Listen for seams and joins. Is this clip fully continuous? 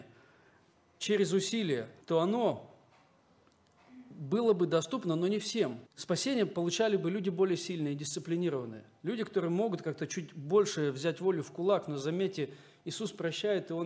no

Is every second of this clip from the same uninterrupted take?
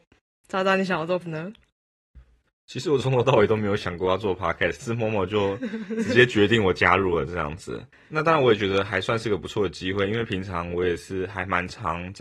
no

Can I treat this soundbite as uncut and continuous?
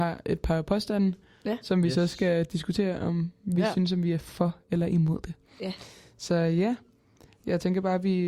yes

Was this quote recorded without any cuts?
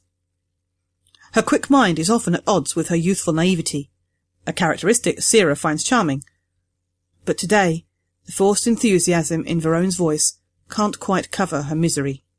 yes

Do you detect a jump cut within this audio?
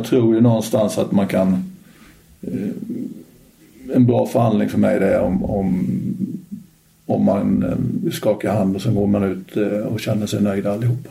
no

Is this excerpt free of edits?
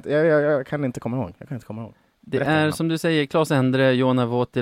yes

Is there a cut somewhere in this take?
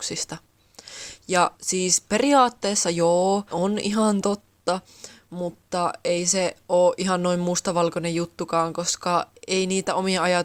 yes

